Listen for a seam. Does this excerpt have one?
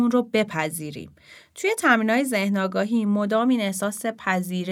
no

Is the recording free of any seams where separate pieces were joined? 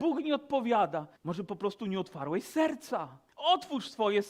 no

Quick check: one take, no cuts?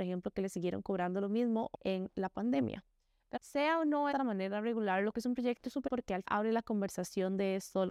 no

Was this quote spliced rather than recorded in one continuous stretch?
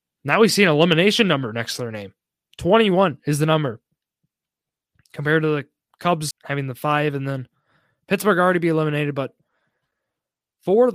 yes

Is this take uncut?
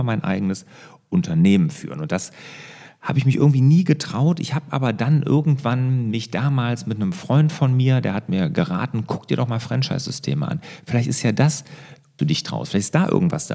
no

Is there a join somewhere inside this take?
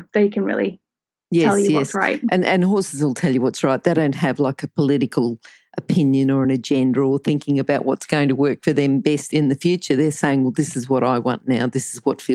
no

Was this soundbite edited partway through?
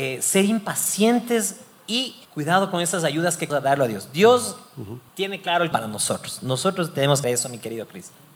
yes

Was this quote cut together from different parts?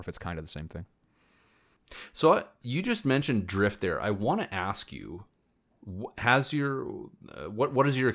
yes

